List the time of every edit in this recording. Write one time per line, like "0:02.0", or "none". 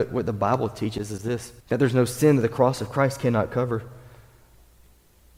0:01.6